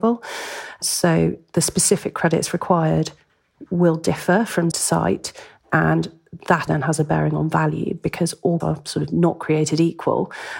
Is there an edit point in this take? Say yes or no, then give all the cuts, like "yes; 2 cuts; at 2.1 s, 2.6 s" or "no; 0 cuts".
yes; 3 cuts; at 4.7 s, 6.7 s, 8.6 s